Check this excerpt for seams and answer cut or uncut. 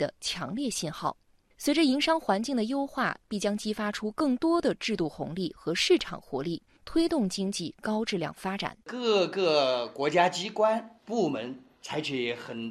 cut